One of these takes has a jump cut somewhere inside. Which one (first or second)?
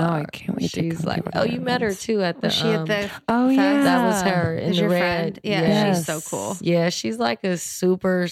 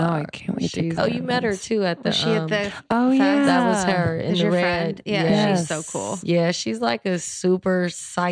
second